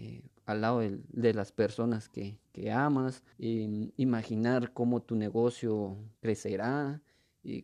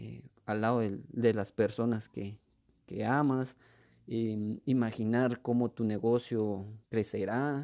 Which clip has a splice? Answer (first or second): first